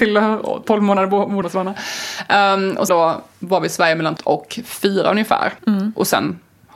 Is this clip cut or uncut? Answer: cut